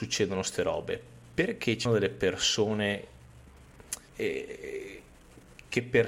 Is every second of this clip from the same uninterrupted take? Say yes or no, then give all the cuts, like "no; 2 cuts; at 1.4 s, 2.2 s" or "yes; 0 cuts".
no; 2 cuts; at 1.9 s, 4.1 s